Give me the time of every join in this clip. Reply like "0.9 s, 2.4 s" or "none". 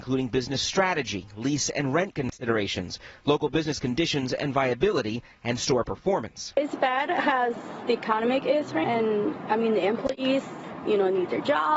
8.8 s